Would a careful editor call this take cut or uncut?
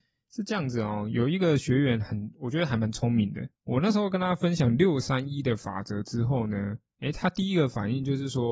cut